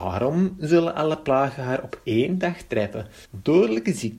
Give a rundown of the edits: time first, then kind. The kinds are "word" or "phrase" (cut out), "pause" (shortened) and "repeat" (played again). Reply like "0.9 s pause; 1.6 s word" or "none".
3.2 s pause